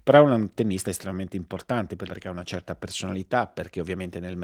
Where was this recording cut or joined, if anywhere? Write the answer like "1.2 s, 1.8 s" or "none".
2.1 s